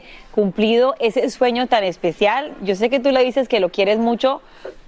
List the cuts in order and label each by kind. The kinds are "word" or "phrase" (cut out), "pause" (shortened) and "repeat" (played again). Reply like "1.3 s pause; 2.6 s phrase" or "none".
none